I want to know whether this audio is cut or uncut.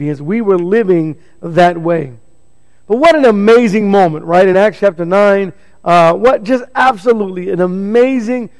uncut